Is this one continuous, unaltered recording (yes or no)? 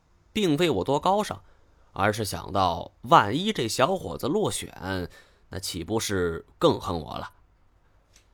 yes